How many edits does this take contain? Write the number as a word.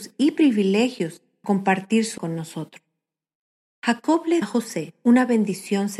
three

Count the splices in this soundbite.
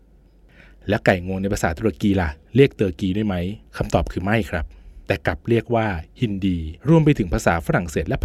three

